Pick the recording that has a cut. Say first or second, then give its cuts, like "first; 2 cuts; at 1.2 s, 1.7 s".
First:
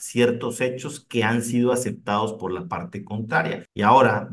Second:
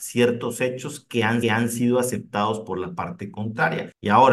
second; 1 cut; at 1.4 s